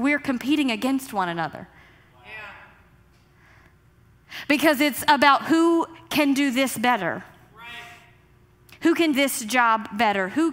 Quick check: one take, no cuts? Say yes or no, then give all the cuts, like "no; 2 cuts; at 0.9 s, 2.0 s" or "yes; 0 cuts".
no; 1 cut; at 9.1 s